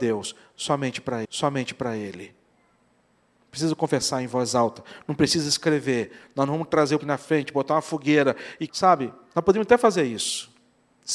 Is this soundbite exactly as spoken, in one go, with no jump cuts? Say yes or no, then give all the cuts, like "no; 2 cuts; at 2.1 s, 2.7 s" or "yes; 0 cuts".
no; 3 cuts; at 1.2 s, 7.0 s, 8.7 s